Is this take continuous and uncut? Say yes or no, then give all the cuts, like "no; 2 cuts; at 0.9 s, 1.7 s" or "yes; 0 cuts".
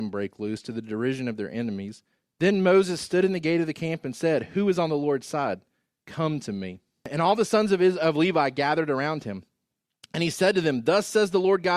yes; 0 cuts